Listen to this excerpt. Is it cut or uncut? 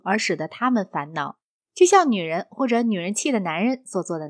uncut